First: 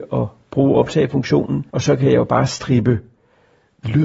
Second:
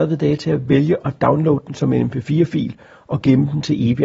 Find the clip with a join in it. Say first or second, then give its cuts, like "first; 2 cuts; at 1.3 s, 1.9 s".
first; 1 cut; at 1.7 s